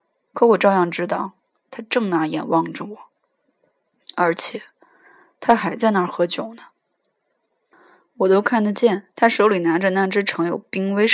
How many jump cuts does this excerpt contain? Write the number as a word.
one